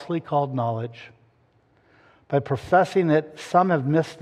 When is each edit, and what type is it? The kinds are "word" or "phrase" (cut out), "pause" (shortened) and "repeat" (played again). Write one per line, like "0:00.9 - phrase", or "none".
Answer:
none